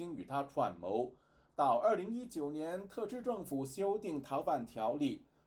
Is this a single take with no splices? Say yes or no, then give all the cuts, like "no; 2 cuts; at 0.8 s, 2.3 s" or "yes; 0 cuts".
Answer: yes; 0 cuts